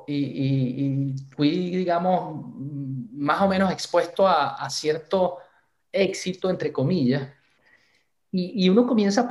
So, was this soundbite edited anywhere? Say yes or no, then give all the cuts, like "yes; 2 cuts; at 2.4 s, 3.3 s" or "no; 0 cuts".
no; 0 cuts